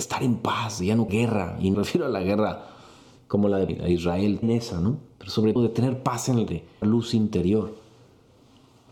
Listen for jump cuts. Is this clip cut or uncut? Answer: cut